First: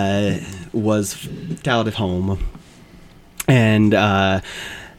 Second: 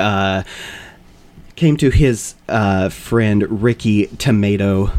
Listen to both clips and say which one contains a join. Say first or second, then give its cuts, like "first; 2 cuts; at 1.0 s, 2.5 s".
first; 2 cuts; at 1.6 s, 1.9 s